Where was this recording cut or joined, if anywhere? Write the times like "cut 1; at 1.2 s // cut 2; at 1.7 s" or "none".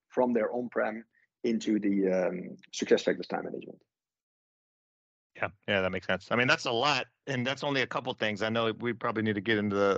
none